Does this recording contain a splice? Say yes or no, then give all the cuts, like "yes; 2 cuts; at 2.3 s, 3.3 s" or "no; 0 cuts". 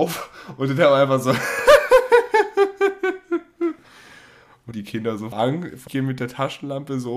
yes; 3 cuts; at 4.7 s, 5.3 s, 5.9 s